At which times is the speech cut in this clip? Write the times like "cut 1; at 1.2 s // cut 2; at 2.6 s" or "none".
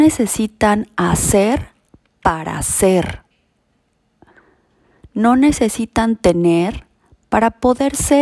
none